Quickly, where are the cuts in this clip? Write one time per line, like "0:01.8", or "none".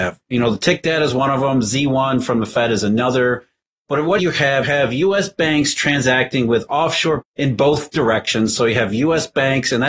0:04.2
0:04.6
0:07.2